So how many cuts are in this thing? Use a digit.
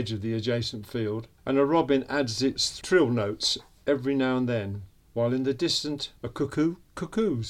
3